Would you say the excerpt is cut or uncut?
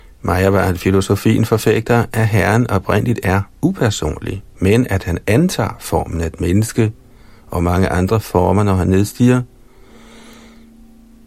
uncut